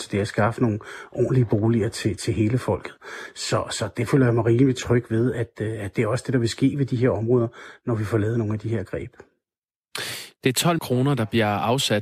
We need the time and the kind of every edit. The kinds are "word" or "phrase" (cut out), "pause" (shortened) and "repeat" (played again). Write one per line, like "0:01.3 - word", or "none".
0:02.2 - word
0:10.8 - word